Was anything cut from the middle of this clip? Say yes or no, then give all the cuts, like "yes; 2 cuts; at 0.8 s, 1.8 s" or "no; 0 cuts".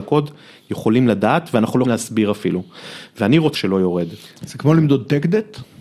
yes; 2 cuts; at 1.8 s, 3.5 s